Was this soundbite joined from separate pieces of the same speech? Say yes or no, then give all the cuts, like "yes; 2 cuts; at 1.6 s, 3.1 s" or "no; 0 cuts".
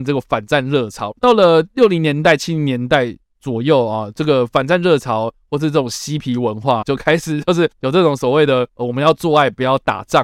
yes; 1 cut; at 6.8 s